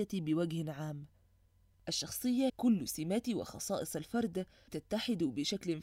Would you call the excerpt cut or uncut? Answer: cut